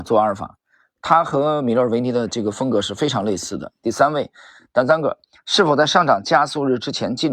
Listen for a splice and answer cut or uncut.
uncut